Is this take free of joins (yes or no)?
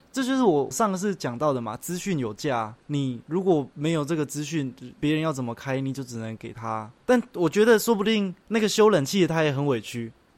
no